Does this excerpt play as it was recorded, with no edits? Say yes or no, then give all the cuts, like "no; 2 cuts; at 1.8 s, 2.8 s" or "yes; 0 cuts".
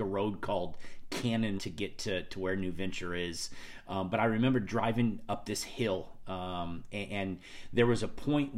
no; 1 cut; at 1.6 s